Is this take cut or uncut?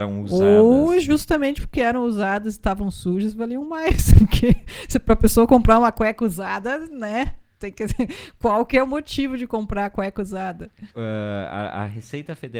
cut